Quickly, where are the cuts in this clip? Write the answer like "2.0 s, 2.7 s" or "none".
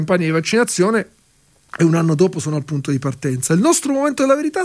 none